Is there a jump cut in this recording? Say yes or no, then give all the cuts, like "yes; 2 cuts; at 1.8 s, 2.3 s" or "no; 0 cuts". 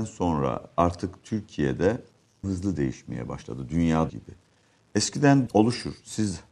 yes; 3 cuts; at 2.4 s, 4.1 s, 5.5 s